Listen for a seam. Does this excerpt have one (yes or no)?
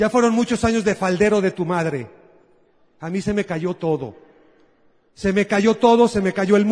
no